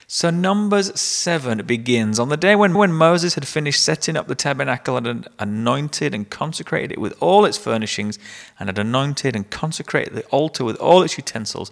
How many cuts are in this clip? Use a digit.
1